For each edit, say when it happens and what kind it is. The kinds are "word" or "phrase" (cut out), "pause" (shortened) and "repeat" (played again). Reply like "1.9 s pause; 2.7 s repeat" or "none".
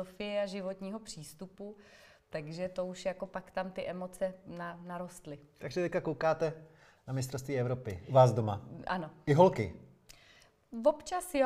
none